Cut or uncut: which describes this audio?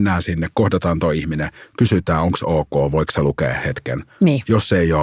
uncut